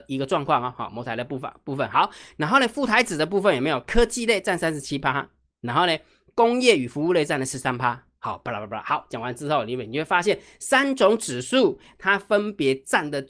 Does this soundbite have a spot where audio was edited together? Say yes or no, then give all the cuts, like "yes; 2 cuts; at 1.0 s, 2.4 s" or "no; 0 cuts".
no; 0 cuts